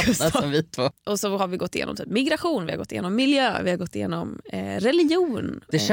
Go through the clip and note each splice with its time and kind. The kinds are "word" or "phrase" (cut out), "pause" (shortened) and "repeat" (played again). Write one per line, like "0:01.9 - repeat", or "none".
none